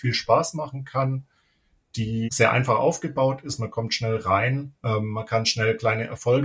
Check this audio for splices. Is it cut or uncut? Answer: cut